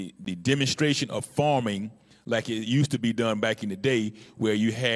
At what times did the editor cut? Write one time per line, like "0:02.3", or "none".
none